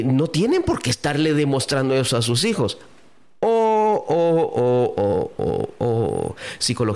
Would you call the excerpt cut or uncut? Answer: uncut